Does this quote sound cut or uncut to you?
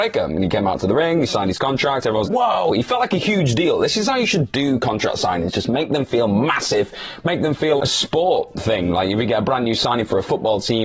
cut